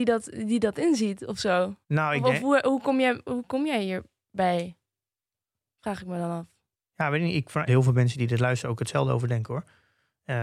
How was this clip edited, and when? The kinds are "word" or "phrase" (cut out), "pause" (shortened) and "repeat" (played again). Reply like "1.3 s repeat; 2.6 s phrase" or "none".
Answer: 1.8 s pause; 7.7 s phrase